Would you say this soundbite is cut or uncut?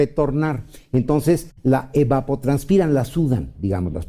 uncut